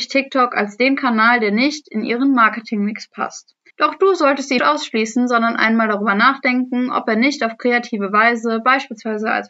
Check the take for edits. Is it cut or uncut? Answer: cut